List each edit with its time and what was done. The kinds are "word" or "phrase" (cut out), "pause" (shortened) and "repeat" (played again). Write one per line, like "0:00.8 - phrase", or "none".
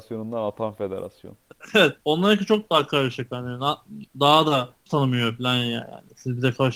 0:02.0 - pause
0:04.1 - pause
0:04.9 - phrase